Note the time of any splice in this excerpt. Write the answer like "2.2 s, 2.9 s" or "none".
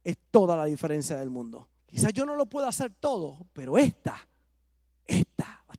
1.8 s